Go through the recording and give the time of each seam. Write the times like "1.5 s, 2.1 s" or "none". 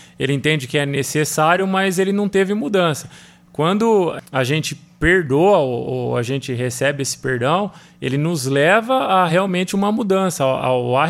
none